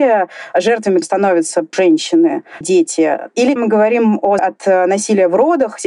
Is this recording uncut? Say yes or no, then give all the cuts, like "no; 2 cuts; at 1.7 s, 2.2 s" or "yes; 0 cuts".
no; 5 cuts; at 1.0 s, 1.7 s, 2.6 s, 3.6 s, 4.4 s